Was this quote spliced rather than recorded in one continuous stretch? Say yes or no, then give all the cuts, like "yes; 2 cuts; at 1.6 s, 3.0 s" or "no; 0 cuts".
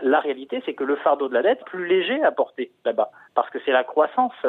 yes; 1 cut; at 1.6 s